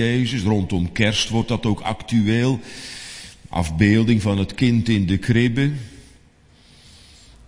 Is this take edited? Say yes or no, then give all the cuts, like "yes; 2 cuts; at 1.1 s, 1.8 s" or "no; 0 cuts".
no; 0 cuts